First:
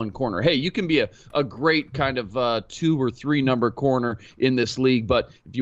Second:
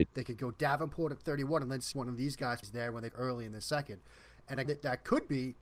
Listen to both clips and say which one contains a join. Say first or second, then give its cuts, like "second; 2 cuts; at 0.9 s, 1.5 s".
second; 4 cuts; at 1.9 s, 2.6 s, 3.1 s, 4.7 s